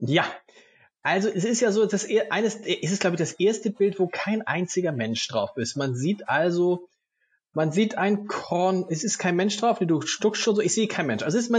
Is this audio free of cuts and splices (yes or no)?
yes